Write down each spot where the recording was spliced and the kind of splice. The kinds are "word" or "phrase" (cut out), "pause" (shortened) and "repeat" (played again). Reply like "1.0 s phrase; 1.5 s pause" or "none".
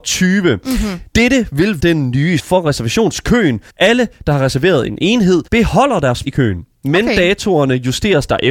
1.1 s pause; 1.8 s word; 2.4 s word; 3.7 s pause; 5.5 s pause; 6.2 s word